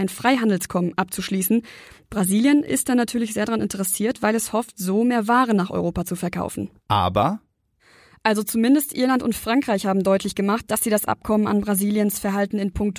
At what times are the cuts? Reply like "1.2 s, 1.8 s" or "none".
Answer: 6.8 s